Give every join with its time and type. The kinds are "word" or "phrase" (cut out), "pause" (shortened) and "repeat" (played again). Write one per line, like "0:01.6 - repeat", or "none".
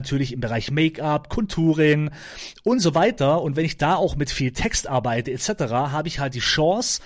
none